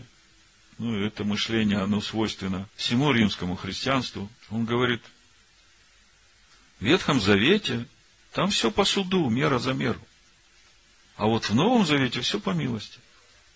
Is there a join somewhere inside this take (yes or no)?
yes